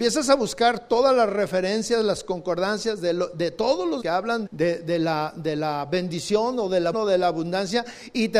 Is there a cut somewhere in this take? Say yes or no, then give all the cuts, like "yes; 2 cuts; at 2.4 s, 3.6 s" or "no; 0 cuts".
yes; 3 cuts; at 4.0 s, 4.5 s, 6.9 s